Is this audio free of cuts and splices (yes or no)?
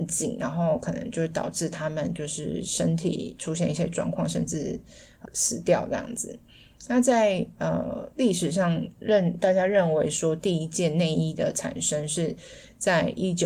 no